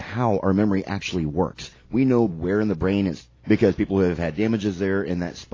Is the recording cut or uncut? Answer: cut